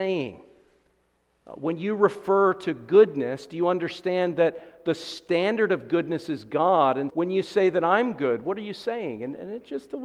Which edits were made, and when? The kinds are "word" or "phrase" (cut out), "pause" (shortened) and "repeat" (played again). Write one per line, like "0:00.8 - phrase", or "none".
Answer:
0:07.1 - word